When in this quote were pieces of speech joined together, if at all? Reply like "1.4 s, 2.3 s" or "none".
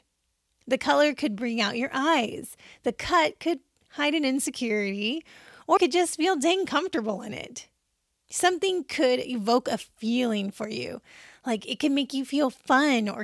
5.8 s